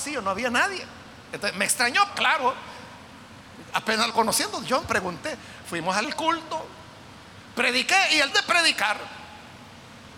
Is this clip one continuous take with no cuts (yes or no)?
no